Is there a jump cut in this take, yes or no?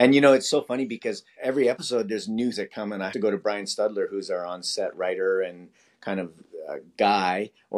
yes